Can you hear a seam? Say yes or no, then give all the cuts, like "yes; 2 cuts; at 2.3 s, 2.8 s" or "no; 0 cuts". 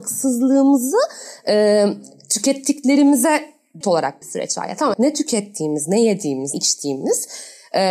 yes; 4 cuts; at 3.8 s, 4.2 s, 4.9 s, 6.5 s